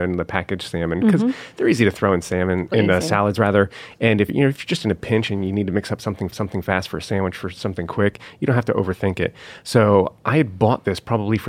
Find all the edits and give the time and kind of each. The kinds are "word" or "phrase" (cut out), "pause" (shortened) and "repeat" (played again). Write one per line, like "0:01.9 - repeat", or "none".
0:02.7 - word
0:04.3 - word
0:06.3 - repeat